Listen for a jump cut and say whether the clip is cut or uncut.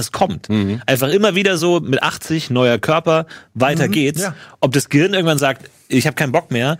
uncut